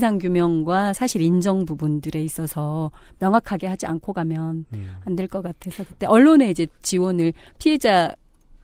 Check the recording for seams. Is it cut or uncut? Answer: uncut